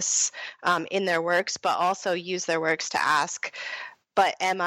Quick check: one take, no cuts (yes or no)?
yes